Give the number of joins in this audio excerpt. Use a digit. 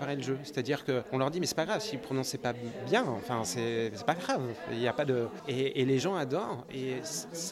0